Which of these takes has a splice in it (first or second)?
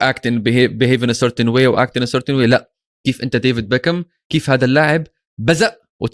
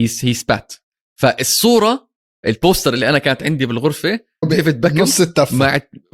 second